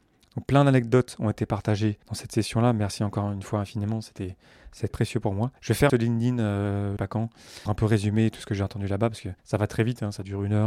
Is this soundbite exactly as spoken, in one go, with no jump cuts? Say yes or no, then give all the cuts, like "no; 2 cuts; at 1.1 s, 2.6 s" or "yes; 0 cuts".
no; 7 cuts; at 2.0 s, 4.9 s, 5.6 s, 5.9 s, 7.0 s, 7.7 s, 9.4 s